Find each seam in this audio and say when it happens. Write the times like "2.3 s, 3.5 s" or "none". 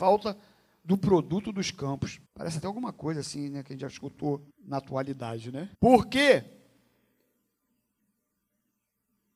2.3 s, 4.5 s, 5.7 s